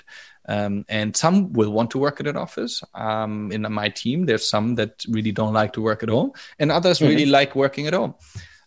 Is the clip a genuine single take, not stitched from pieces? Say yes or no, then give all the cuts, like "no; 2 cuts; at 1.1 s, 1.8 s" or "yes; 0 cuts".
yes; 0 cuts